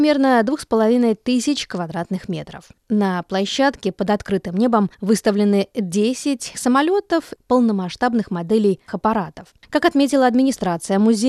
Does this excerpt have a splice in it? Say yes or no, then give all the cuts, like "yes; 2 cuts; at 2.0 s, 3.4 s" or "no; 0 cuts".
yes; 5 cuts; at 2.7 s, 4.9 s, 6.5 s, 7.4 s, 8.9 s